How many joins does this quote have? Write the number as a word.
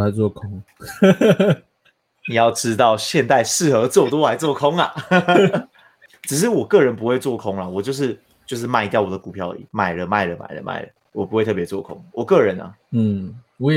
one